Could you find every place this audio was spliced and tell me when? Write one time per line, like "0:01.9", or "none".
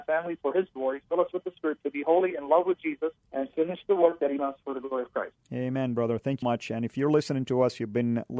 0:03.2
0:04.4
0:05.4
0:06.4